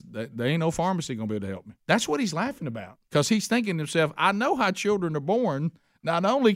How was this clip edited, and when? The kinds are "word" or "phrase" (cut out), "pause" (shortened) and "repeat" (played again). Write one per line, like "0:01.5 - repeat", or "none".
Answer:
0:01.8 - pause
0:03.0 - pause